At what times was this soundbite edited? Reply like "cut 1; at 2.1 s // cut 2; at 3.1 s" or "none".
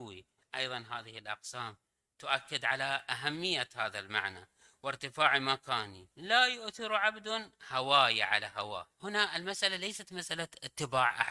cut 1; at 6.1 s // cut 2; at 8.9 s